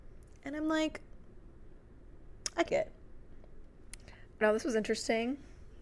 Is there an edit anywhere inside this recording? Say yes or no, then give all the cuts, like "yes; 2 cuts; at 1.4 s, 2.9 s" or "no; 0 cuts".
yes; 2 cuts; at 2.7 s, 4.4 s